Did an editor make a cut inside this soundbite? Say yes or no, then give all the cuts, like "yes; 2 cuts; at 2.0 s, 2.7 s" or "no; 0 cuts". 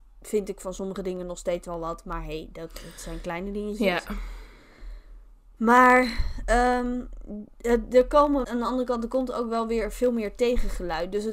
yes; 1 cut; at 8.4 s